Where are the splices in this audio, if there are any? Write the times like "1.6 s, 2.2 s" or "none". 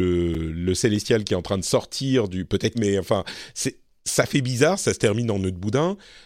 2.7 s